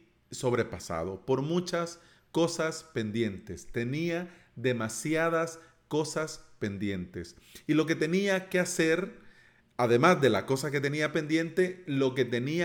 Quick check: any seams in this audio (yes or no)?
no